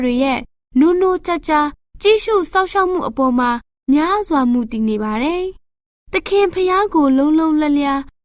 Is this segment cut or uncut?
uncut